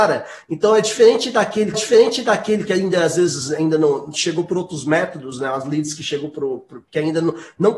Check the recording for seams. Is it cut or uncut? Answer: cut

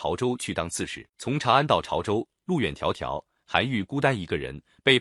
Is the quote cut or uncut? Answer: cut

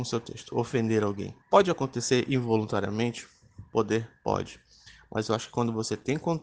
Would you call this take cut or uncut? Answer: cut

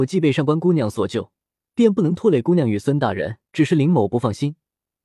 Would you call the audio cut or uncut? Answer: cut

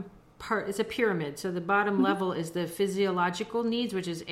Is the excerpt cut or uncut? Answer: uncut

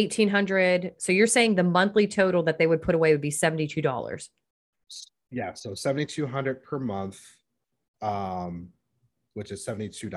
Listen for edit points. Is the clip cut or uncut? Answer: uncut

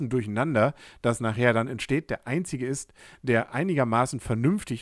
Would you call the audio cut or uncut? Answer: uncut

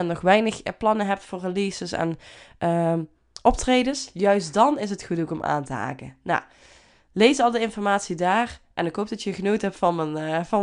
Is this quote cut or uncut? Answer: uncut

